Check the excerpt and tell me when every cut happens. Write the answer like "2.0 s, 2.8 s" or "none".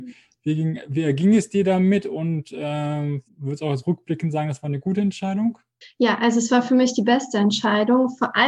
3.3 s, 5.8 s